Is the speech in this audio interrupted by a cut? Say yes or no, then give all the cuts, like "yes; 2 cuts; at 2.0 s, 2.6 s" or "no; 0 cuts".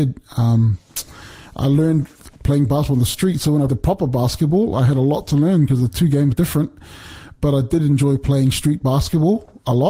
yes; 3 cuts; at 2.4 s, 3.7 s, 6.3 s